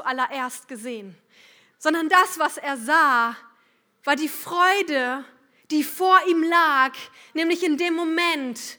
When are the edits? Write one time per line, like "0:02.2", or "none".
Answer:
none